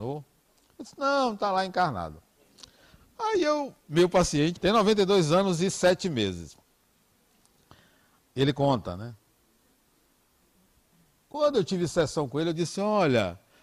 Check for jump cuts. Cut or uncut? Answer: cut